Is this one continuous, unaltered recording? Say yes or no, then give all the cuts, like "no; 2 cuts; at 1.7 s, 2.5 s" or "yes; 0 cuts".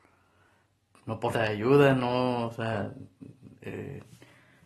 no; 1 cut; at 1.3 s